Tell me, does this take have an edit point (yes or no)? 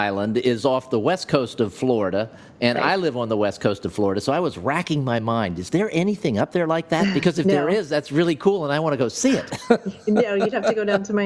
no